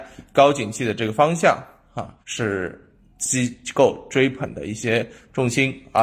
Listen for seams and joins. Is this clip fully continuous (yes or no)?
no